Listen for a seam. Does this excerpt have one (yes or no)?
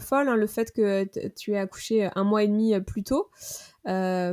no